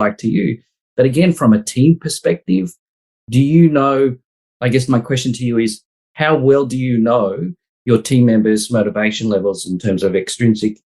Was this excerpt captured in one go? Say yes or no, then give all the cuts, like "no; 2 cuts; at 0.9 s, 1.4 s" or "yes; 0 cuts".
yes; 0 cuts